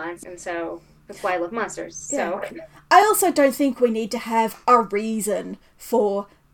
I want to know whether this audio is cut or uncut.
uncut